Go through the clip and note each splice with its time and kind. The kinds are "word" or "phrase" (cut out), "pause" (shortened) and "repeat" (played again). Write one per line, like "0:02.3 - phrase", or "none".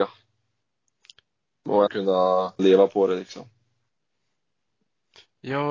0:01.9 - word
0:02.6 - word